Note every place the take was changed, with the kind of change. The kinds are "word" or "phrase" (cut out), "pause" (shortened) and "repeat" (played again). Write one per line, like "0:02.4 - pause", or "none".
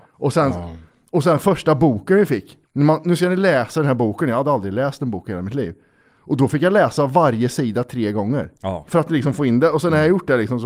0:02.7 - pause
0:08.6 - pause